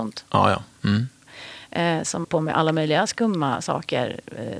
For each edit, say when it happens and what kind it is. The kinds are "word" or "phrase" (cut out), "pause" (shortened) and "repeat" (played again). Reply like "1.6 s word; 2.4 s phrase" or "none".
2.2 s word